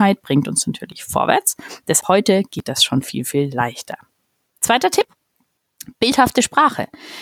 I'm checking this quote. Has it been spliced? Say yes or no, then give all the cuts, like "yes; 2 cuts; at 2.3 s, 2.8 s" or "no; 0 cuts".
yes; 1 cut; at 2.0 s